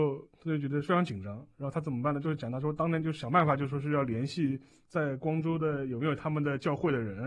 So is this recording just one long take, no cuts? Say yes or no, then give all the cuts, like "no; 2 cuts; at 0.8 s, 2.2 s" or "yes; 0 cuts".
yes; 0 cuts